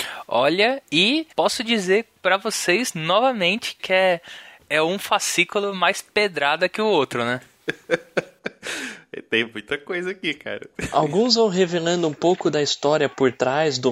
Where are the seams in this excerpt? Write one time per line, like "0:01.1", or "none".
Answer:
0:01.3
0:03.8